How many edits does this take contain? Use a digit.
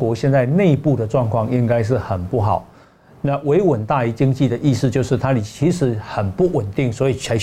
0